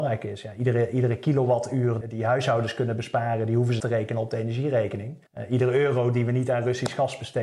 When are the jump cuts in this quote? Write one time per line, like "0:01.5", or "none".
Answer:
0:02.0
0:03.8
0:05.3